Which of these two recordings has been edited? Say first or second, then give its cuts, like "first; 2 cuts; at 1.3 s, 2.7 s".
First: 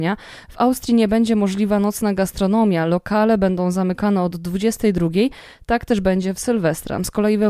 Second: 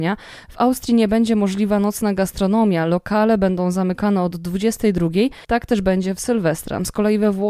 second; 1 cut; at 5.4 s